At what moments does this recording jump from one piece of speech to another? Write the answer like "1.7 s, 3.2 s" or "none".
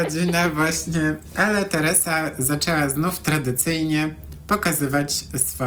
none